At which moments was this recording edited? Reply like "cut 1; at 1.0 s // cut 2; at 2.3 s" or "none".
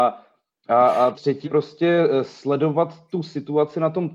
cut 1; at 1.1 s // cut 2; at 1.4 s